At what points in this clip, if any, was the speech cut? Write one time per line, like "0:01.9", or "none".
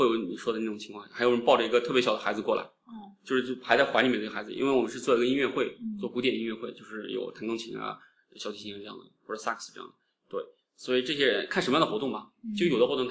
none